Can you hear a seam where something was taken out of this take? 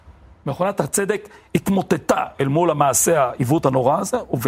no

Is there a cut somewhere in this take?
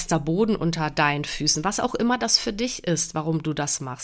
no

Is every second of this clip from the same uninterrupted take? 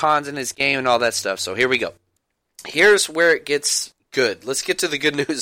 yes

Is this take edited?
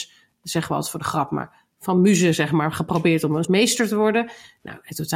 yes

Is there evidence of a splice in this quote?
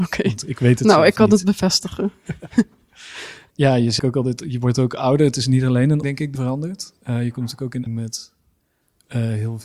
yes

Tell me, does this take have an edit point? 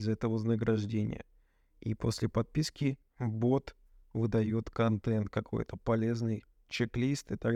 no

